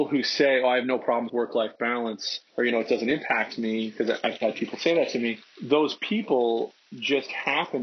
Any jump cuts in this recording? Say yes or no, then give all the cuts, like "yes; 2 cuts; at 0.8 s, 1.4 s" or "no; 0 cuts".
yes; 4 cuts; at 1.3 s, 2.5 s, 4.4 s, 5.4 s